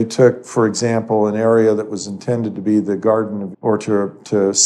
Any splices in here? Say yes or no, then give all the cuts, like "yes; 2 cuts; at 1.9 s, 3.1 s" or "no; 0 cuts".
yes; 1 cut; at 3.5 s